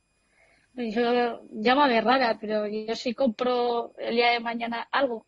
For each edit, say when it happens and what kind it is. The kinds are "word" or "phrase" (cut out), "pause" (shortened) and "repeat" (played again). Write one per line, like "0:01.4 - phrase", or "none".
none

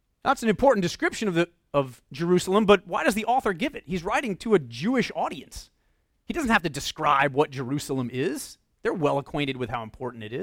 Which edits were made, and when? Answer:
none

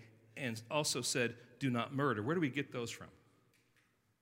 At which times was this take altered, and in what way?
none

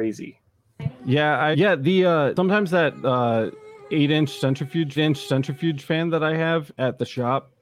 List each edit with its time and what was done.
0:01.5 - word
0:05.0 - repeat

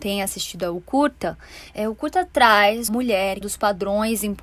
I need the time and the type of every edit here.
0:02.9 - word
0:03.4 - phrase

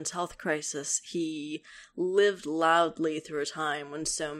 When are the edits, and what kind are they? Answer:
none

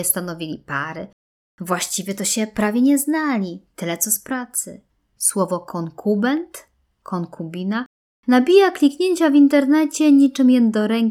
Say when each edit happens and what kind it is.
none

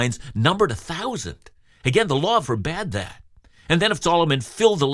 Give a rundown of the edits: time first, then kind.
0:02.4 - word
0:04.0 - word

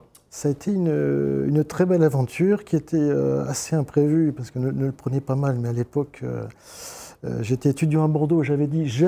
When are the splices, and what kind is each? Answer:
none

